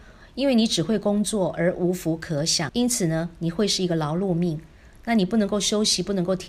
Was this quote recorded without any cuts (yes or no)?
yes